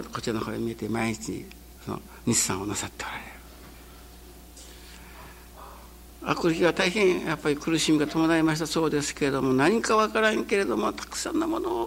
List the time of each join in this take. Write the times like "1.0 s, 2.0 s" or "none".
1.8 s